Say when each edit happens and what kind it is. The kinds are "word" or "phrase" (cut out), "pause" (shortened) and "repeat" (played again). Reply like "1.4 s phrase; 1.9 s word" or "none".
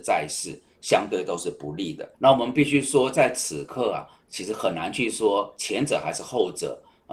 2.1 s pause